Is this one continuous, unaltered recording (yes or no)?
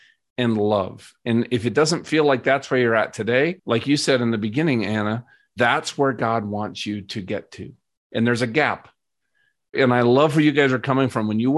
no